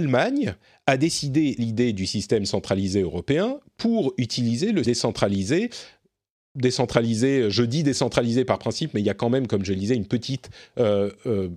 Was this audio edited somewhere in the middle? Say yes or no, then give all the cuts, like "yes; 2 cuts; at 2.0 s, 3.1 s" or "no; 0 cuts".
yes; 2 cuts; at 1.6 s, 4.8 s